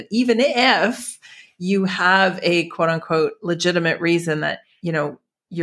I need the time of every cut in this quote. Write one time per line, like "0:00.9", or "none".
none